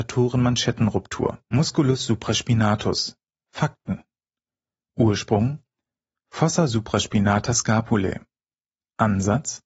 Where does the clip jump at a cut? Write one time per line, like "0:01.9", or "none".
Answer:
0:01.4